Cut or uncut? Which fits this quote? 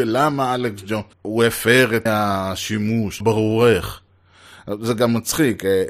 cut